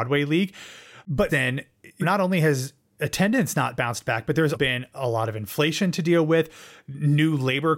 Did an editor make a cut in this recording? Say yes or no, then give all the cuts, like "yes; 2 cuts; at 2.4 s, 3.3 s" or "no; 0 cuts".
yes; 3 cuts; at 1.3 s, 2.0 s, 4.5 s